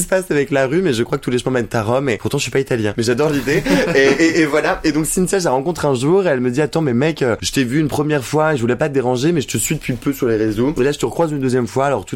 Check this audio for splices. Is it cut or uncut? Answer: uncut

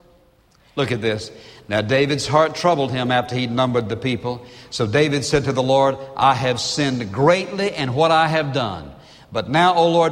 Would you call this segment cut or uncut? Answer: uncut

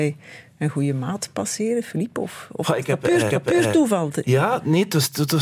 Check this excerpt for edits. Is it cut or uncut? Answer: cut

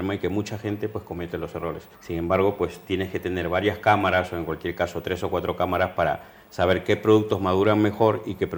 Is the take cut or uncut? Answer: cut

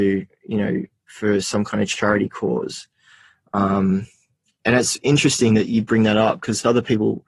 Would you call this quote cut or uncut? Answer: uncut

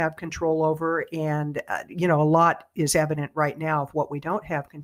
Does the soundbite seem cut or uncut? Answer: uncut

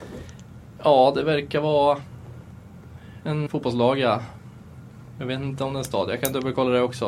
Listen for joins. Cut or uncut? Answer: cut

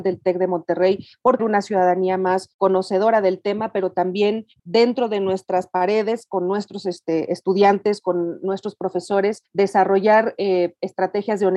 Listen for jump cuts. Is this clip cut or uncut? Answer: cut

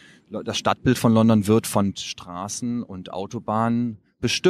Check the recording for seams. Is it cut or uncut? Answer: cut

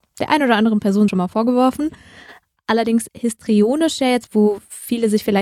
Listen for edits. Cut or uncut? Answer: cut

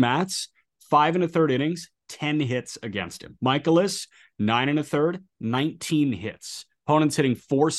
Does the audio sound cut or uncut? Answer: uncut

